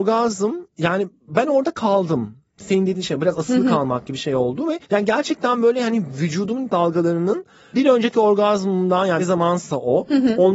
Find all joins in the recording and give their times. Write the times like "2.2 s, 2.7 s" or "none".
4.8 s, 6.7 s